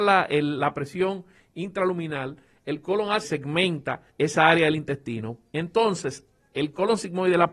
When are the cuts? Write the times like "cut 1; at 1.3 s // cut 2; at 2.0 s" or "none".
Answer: cut 1; at 3.2 s // cut 2; at 4.1 s